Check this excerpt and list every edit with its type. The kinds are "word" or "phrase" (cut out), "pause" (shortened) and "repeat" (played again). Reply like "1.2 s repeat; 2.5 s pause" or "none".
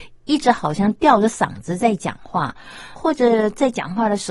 2.9 s word